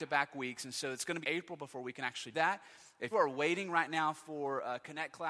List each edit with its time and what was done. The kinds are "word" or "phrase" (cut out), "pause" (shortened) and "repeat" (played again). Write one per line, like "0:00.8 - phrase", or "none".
0:01.2 - word
0:02.3 - word
0:03.1 - word